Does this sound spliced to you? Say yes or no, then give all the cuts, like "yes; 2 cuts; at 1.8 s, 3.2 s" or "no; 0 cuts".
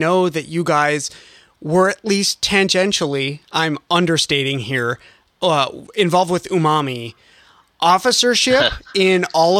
no; 0 cuts